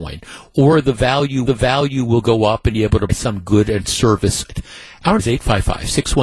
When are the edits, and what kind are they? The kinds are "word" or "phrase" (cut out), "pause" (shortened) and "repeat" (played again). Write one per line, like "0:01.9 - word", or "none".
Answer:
0:01.5 - repeat
0:02.7 - phrase
0:03.1 - word
0:04.5 - word
0:05.2 - word